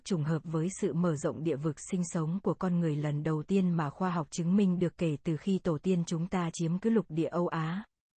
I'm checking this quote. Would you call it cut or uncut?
uncut